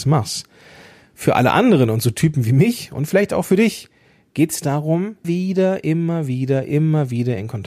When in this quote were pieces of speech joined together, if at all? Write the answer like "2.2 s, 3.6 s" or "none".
5.2 s